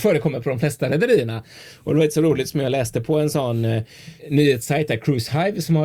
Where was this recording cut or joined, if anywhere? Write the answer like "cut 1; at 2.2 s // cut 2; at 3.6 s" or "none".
cut 1; at 4.2 s